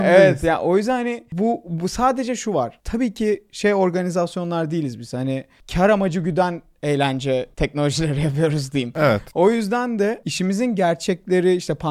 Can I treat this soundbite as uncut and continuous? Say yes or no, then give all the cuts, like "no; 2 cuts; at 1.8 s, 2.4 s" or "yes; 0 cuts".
no; 1 cut; at 7.5 s